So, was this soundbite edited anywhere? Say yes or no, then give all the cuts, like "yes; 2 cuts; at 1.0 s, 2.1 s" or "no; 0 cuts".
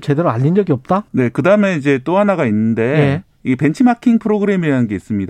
yes; 1 cut; at 1.1 s